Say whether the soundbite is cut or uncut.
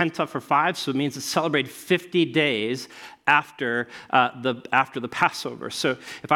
uncut